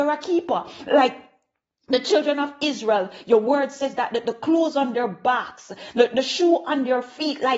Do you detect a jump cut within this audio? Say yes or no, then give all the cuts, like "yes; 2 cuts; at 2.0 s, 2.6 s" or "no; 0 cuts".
no; 0 cuts